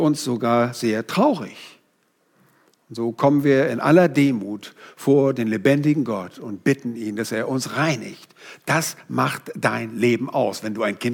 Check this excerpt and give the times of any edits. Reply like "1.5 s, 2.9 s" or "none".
none